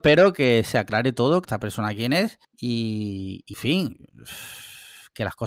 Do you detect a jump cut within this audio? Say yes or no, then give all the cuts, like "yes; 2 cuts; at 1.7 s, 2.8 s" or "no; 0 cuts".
yes; 4 cuts; at 1.4 s, 2.4 s, 3.5 s, 4.1 s